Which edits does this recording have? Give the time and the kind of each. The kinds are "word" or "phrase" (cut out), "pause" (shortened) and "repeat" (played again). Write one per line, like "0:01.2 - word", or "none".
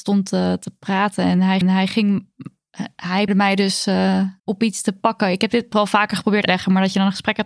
0:01.6 - repeat
0:03.3 - word
0:04.4 - pause
0:06.5 - phrase